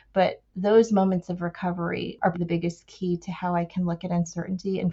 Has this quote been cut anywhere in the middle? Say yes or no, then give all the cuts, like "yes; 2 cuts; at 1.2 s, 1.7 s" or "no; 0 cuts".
yes; 1 cut; at 2.3 s